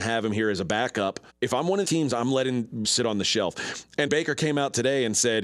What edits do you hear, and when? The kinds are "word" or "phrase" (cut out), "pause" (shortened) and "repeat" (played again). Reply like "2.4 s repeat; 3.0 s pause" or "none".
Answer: 1.3 s pause; 1.8 s word; 2.8 s word; 4.1 s word